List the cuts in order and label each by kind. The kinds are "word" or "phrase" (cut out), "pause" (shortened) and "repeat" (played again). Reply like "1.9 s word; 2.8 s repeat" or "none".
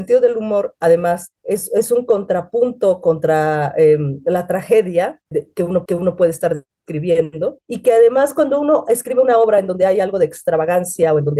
5.3 s word; 5.8 s repeat